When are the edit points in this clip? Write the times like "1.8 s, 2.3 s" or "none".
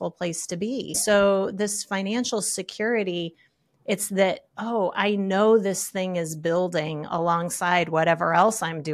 none